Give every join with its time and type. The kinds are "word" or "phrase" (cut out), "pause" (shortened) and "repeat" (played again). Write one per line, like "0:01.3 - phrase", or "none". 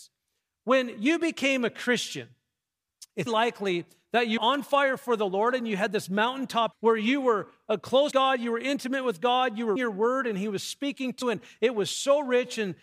0:03.3 - word
0:04.4 - word
0:06.7 - word
0:08.1 - word
0:09.8 - word
0:11.2 - word